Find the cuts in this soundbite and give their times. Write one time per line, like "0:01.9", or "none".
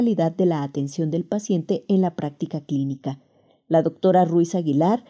none